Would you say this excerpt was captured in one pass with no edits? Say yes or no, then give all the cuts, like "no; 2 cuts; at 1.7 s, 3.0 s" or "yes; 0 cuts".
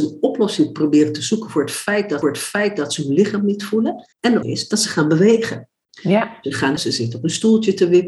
no; 4 cuts; at 2.2 s, 4.1 s, 4.4 s, 6.8 s